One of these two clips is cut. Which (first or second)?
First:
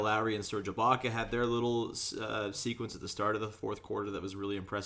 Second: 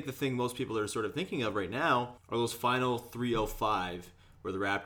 second